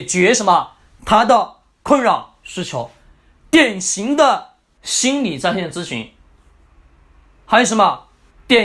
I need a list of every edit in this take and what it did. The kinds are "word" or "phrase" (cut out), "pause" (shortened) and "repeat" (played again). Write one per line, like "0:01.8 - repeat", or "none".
none